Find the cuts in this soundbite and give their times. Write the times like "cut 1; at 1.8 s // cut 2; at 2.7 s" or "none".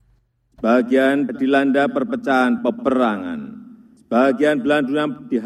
cut 1; at 1.3 s // cut 2; at 2.6 s